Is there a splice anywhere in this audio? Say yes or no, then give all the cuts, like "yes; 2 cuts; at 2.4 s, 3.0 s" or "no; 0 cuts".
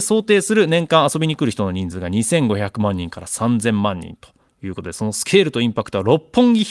no; 0 cuts